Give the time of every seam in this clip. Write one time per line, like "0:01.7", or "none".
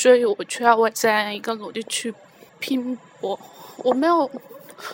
0:02.5